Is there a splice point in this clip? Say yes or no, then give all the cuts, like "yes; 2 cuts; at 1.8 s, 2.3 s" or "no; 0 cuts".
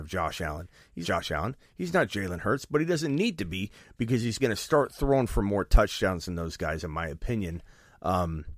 yes; 2 cuts; at 1.0 s, 4.4 s